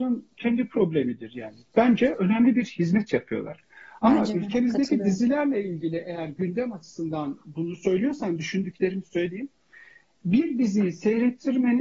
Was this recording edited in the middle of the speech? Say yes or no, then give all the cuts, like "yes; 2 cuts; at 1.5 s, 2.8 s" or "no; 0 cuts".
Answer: no; 0 cuts